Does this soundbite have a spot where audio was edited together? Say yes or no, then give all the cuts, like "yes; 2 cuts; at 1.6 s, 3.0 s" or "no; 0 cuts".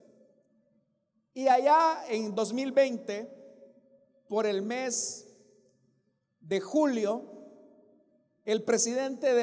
no; 0 cuts